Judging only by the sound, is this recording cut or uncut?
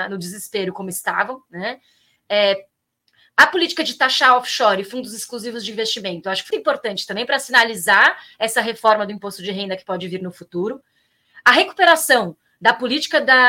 cut